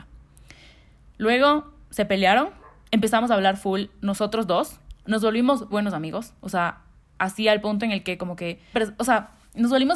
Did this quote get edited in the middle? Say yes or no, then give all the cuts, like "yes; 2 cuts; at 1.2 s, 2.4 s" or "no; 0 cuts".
yes; 2 cuts; at 5.7 s, 8.7 s